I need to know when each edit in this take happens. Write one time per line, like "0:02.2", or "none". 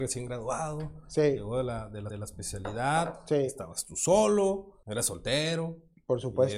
0:02.1
0:04.8

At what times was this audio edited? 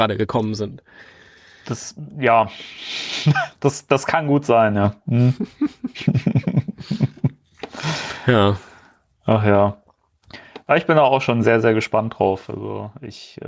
none

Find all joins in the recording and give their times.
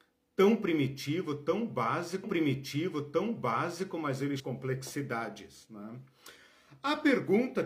0:02.2
0:04.4

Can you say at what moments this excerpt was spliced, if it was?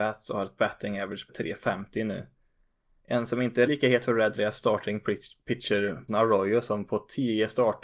0:01.3
0:03.7
0:04.4
0:06.1

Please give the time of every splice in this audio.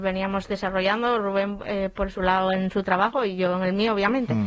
none

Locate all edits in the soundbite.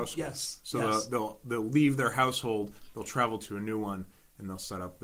none

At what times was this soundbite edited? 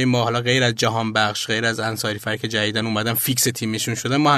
none

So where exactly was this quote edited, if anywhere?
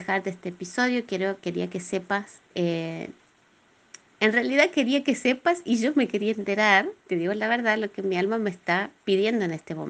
0:02.5
0:07.0

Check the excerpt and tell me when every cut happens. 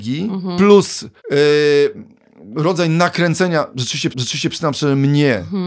0:01.2
0:04.1

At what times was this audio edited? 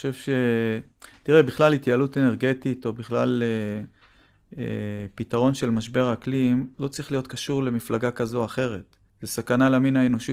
0:06.7
0:09.1

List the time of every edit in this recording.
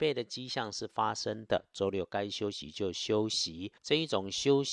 0:03.8

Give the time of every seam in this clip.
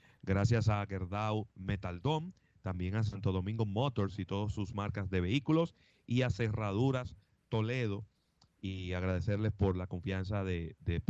0:01.5

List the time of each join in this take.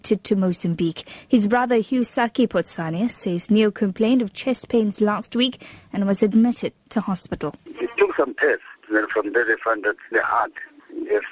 0:08.8
0:10.1

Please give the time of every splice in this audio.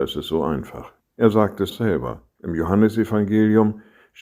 0:01.0
0:01.7

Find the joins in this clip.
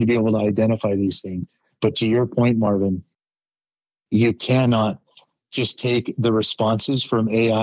none

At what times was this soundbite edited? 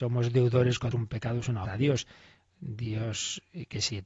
0:00.9
0:01.7

